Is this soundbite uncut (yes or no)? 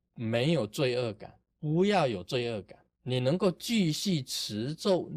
no